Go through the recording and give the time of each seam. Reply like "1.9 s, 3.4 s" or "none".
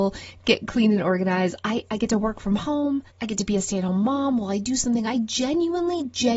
3.1 s